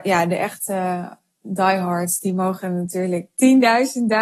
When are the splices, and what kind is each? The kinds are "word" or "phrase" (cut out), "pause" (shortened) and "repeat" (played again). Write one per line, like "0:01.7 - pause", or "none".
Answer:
none

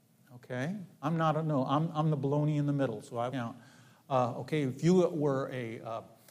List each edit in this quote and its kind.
0:00.9 - pause
0:03.3 - word

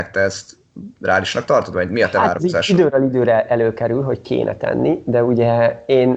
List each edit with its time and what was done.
0:01.7 - word

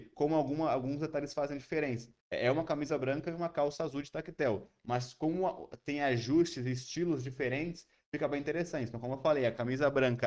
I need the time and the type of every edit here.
0:02.2 - pause

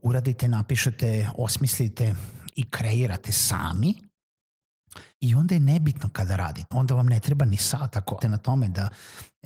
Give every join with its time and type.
0:05.1 - pause
0:06.7 - word
0:08.2 - phrase

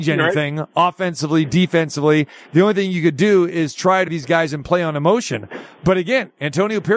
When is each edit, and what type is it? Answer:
0:04.1 - word

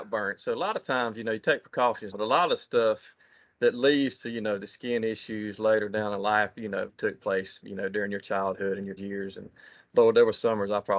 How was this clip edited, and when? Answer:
0:02.1 - word
0:06.9 - word
0:09.0 - word

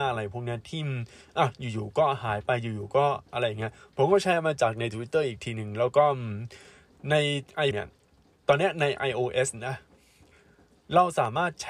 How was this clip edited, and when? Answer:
0:07.7 - word

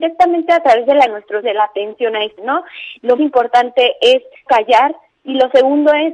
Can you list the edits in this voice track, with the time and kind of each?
0:01.1 - word
0:01.4 - word
0:02.4 - word
0:03.2 - word
0:04.5 - word

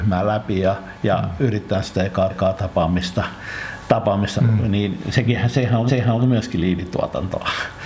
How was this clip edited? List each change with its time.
0:01.8 - word
0:02.3 - repeat
0:04.4 - word
0:05.9 - repeat

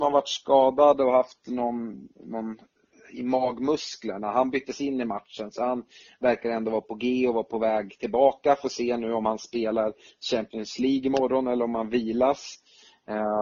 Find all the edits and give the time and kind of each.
none

